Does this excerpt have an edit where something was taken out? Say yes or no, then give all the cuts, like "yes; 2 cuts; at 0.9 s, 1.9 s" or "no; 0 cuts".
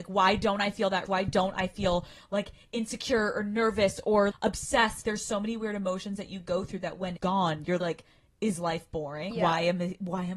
yes; 6 cuts; at 1.1 s, 4.3 s, 5.0 s, 7.2 s, 7.8 s, 9.3 s